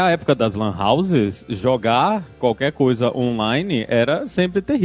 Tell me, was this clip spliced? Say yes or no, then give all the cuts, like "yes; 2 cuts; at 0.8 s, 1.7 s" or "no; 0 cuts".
no; 0 cuts